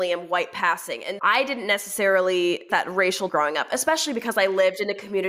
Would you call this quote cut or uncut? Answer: cut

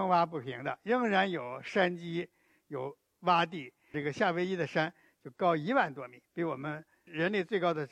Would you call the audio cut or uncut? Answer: cut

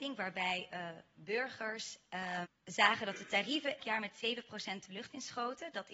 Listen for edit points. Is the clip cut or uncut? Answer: cut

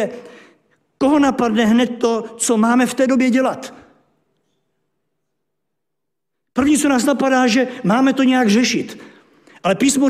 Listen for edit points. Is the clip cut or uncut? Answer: uncut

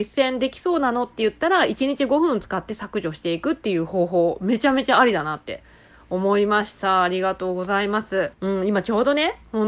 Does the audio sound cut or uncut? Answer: cut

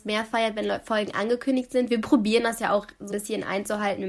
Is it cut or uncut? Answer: cut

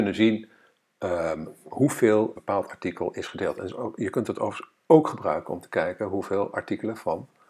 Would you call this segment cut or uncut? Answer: cut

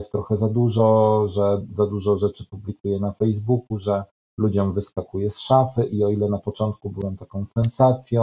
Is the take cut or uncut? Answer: uncut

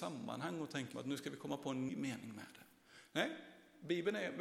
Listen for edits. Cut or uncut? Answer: cut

